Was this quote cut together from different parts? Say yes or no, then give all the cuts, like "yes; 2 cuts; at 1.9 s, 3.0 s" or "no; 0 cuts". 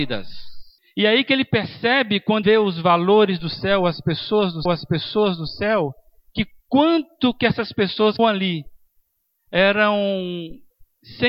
yes; 3 cuts; at 2.4 s, 4.7 s, 8.2 s